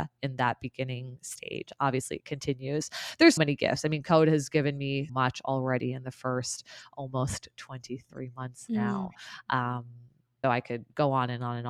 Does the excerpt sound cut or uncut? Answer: cut